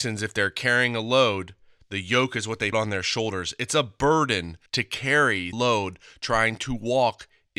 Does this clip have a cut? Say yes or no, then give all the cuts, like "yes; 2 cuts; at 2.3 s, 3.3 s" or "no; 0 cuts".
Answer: yes; 3 cuts; at 2.7 s, 4.7 s, 5.5 s